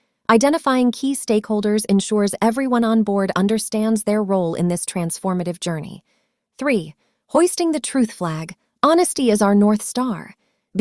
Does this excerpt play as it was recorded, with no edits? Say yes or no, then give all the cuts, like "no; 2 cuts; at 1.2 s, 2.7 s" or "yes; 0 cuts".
yes; 0 cuts